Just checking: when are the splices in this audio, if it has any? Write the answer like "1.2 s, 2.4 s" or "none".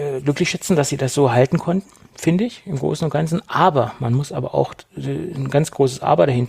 none